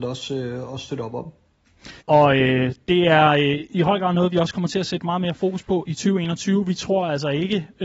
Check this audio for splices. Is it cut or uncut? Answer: cut